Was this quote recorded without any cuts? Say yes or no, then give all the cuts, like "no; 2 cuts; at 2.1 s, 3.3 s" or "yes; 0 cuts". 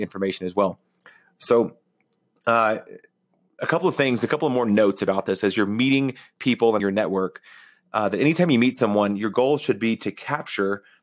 no; 1 cut; at 6.8 s